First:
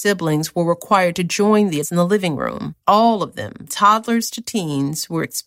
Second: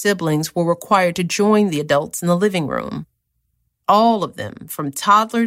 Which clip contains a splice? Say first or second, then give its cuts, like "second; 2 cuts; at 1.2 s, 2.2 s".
first; 3 cuts; at 1.8 s, 2.8 s, 3.7 s